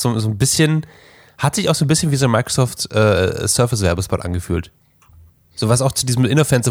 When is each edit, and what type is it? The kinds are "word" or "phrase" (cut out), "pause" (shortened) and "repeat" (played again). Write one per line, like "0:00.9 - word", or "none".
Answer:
none